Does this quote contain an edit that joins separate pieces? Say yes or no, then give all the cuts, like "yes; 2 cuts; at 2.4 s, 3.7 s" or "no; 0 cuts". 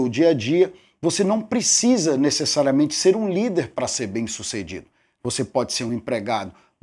no; 0 cuts